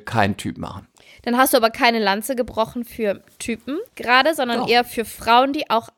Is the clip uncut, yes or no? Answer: no